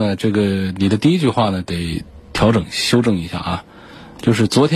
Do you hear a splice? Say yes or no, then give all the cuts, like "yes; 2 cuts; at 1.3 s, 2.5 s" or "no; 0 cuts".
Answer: no; 0 cuts